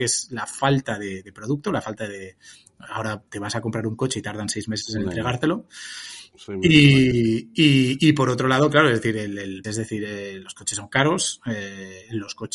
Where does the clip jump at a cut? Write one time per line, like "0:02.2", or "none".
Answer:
0:03.3
0:09.6